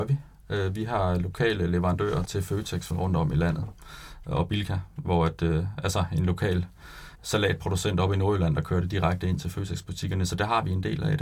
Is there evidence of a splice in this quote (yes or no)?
yes